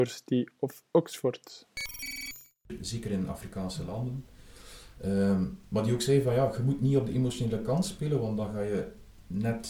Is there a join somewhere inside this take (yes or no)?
no